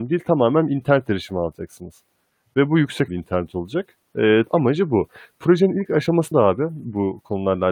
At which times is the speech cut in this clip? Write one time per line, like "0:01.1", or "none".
0:03.1
0:04.5
0:06.3